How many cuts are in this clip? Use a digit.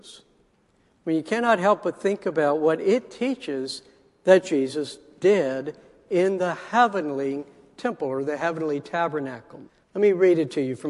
1